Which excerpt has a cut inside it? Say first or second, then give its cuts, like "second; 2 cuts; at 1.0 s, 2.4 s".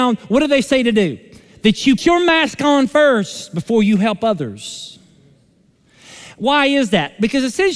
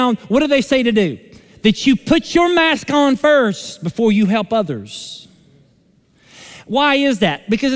first; 1 cut; at 2.0 s